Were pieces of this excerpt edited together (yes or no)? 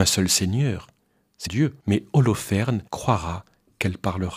yes